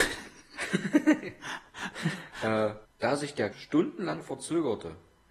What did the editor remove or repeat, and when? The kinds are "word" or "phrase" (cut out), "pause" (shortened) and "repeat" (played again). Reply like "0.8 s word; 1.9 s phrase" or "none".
2.8 s pause; 3.5 s word

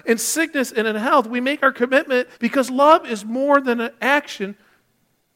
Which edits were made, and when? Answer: 2.3 s pause

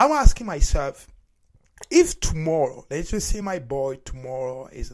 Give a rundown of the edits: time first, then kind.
none

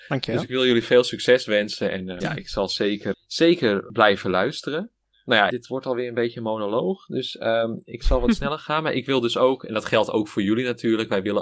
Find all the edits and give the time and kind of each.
2.2 s word; 3.1 s word; 5.5 s word

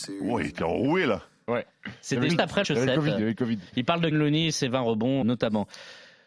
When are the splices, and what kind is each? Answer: 2.3 s word; 2.6 s word; 4.1 s word; 5.2 s word

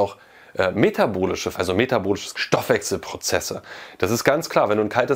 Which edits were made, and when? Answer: 1.5 s word; 2.3 s word

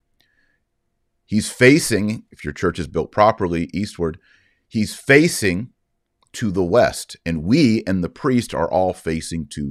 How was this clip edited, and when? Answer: none

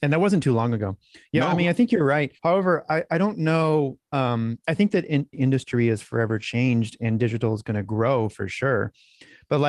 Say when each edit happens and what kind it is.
2.4 s pause; 5.3 s word

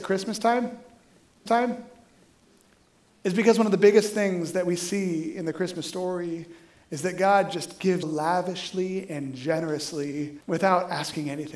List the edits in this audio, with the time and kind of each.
1.5 s repeat; 8.0 s word; 10.4 s pause

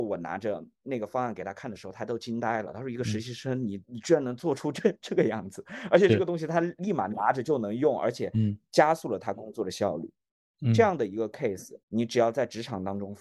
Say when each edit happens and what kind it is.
3.8 s pause; 11.8 s pause

